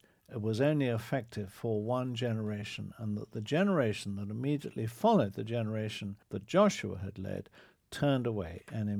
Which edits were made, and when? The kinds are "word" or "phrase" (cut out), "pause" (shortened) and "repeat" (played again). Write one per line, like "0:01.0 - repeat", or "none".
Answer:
0:06.2 - pause